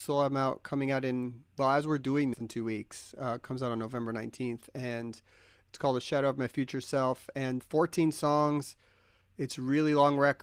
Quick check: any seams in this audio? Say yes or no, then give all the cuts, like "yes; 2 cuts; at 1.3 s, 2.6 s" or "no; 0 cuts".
yes; 2 cuts; at 2.3 s, 7.6 s